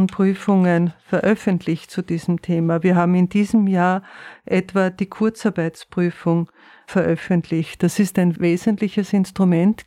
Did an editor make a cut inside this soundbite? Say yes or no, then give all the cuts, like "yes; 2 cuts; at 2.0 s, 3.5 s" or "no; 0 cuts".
no; 0 cuts